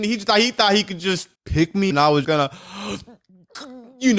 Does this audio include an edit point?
yes; 3 cuts; at 1.3 s, 1.9 s, 2.2 s

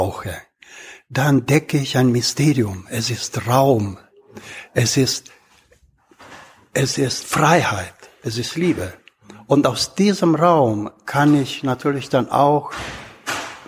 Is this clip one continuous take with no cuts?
yes; 0 cuts

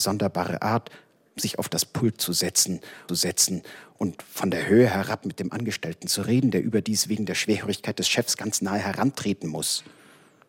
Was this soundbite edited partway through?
yes; 1 cut; at 3.1 s

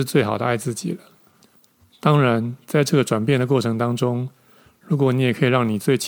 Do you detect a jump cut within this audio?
no; 0 cuts

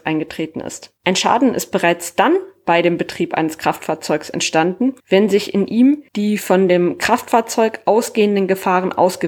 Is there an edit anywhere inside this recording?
yes; 3 cuts; at 1.0 s, 5.0 s, 6.1 s

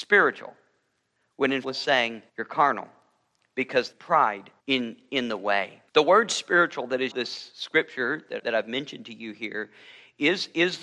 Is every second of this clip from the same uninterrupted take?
no; 7 cuts; at 1.6 s, 2.3 s, 3.9 s, 4.6 s, 5.9 s, 7.1 s, 8.4 s

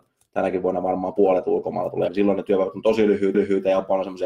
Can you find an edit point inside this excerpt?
yes; 2 cuts; at 2.1 s, 3.3 s

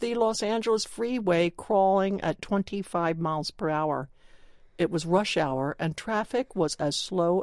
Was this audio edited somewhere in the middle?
no; 0 cuts

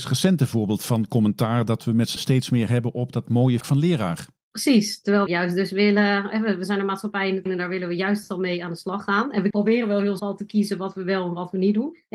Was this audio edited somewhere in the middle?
yes; 6 cuts; at 2.2 s, 3.6 s, 5.3 s, 7.5 s, 9.5 s, 10.2 s

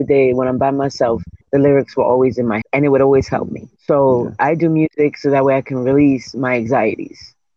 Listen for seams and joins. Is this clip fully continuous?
no; 3 cuts; at 1.4 s, 2.6 s, 3.8 s

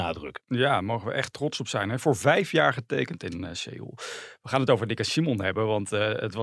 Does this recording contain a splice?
no; 0 cuts

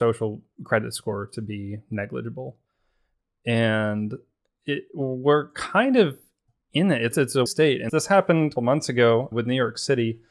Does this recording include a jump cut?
yes; 6 cuts; at 4.9 s, 7.1 s, 7.5 s, 7.9 s, 8.6 s, 9.3 s

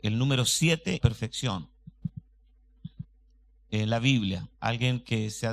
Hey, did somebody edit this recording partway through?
yes; 2 cuts; at 1.0 s, 4.5 s

